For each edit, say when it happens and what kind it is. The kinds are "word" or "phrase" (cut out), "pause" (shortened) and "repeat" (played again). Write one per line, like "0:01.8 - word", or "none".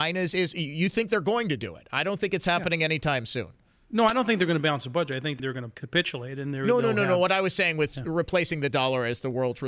none